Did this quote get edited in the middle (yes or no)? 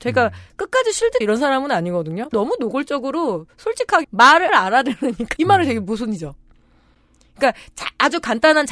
yes